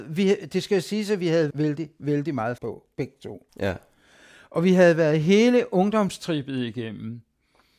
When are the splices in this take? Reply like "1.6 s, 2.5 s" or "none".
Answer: 1.5 s, 2.6 s, 3.5 s